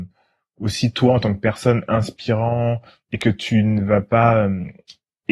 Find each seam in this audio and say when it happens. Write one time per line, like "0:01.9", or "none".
none